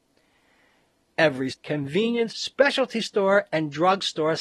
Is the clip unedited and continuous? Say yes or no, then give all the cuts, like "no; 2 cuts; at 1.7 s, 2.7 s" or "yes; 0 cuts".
no; 2 cuts; at 1.5 s, 2.3 s